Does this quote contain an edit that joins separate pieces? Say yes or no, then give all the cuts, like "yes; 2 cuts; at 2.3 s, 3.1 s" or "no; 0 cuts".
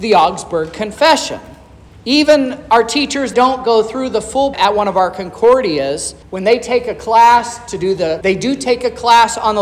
yes; 5 cuts; at 1.9 s, 3.3 s, 4.5 s, 6.2 s, 8.2 s